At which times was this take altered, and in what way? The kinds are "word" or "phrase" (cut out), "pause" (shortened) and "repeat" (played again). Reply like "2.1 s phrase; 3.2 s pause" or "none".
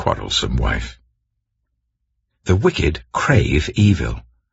none